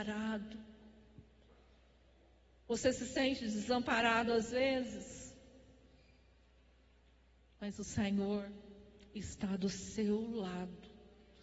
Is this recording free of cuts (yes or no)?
yes